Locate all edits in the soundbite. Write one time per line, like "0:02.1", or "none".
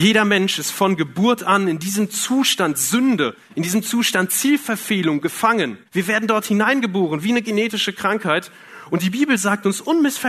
0:05.9